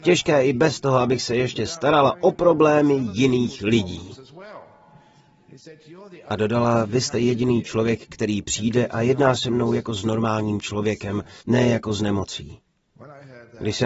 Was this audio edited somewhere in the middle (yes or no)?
yes